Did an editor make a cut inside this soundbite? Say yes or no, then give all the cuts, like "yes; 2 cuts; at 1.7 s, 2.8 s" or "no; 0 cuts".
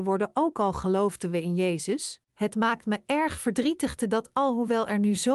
yes; 2 cuts; at 2.2 s, 4.1 s